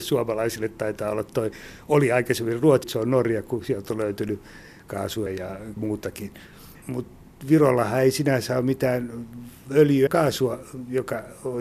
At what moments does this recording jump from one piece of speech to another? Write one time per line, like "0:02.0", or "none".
0:02.8
0:05.3
0:05.8
0:10.1